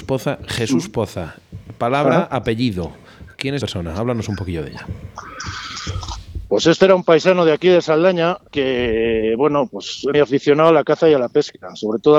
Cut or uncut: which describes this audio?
cut